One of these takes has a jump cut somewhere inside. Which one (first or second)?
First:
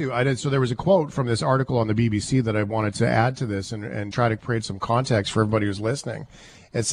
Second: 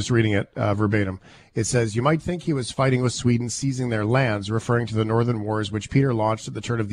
first